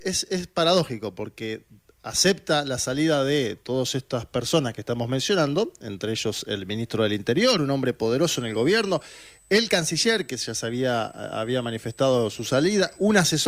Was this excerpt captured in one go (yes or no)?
yes